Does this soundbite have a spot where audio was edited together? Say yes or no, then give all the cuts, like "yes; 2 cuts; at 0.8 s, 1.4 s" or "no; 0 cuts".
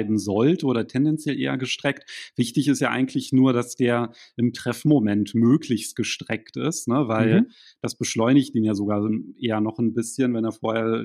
no; 0 cuts